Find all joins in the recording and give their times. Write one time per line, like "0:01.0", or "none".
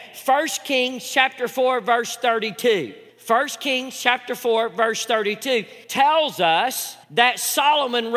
0:03.1
0:05.8
0:07.0